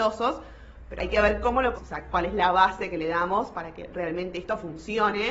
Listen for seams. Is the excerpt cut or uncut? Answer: cut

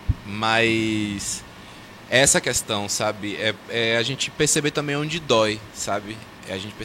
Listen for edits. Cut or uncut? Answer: uncut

